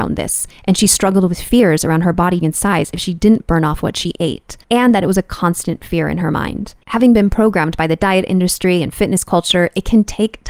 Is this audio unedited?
no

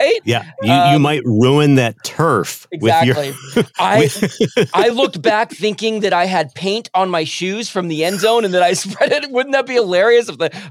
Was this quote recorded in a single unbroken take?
yes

